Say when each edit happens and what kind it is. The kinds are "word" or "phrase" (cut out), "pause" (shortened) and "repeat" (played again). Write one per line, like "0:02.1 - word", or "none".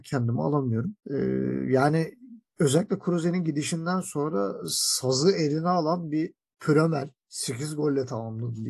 0:01.0 - pause
0:07.2 - pause